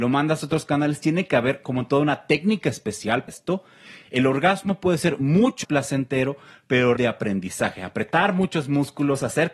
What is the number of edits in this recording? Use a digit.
3